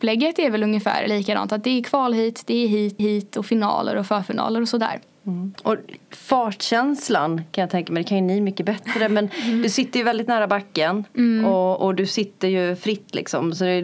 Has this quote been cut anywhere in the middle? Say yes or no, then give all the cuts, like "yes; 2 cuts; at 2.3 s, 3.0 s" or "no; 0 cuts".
yes; 2 cuts; at 3.0 s, 6.0 s